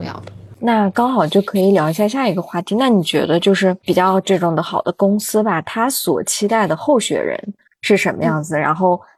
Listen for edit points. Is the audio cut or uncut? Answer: uncut